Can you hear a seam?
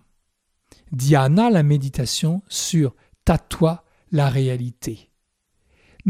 no; 0 cuts

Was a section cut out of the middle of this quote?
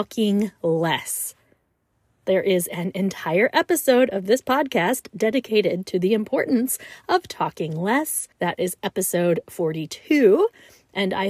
yes; 1 cut; at 8.3 s

